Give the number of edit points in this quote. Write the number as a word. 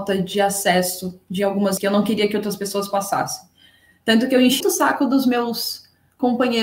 two